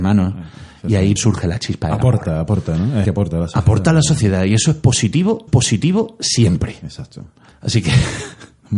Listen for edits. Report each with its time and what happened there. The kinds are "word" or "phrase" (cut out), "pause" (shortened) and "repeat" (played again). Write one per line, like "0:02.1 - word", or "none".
0:01.2 - word
0:03.0 - word
0:05.5 - repeat
0:07.5 - pause